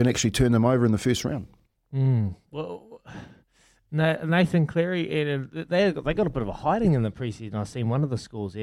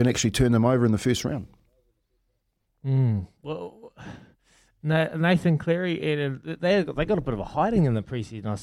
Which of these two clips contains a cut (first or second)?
first